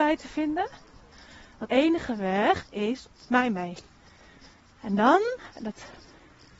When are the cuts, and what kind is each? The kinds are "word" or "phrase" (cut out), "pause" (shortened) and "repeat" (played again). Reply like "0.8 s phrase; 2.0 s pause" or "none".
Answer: 1.7 s word; 3.3 s phrase; 4.6 s pause